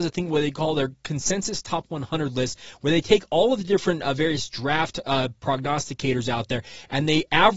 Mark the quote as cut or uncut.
uncut